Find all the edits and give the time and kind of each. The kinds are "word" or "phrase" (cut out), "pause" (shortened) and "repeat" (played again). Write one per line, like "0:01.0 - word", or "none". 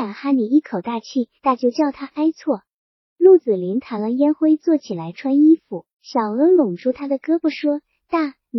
0:01.4 - pause
0:05.9 - pause